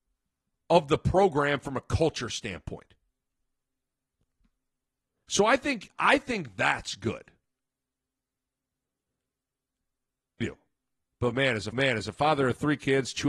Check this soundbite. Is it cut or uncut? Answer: cut